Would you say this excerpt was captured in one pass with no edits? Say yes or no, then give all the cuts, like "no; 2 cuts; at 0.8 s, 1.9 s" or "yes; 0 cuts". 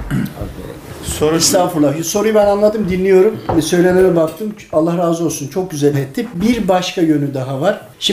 no; 1 cut; at 5.9 s